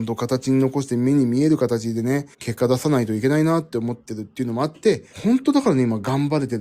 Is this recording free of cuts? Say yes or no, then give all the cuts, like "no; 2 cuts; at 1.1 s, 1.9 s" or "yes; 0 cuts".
no; 2 cuts; at 2.3 s, 5.1 s